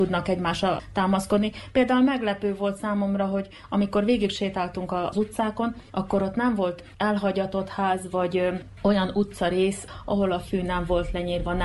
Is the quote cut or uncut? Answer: uncut